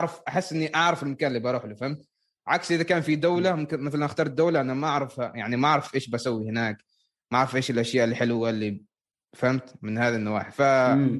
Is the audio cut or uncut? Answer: uncut